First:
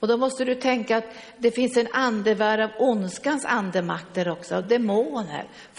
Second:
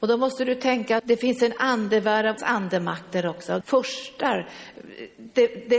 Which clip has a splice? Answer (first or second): second